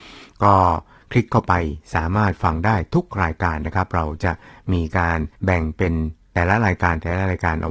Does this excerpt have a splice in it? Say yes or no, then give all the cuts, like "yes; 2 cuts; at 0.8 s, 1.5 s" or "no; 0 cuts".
yes; 1 cut; at 5.3 s